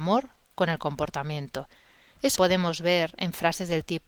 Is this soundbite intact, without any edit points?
no; 1 cut; at 2.4 s

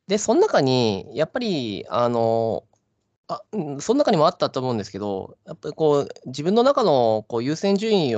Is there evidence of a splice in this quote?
yes; 1 cut; at 3.5 s

